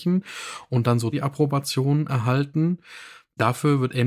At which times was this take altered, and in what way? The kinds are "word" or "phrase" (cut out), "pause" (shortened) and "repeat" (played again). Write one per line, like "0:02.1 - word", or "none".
0:01.1 - word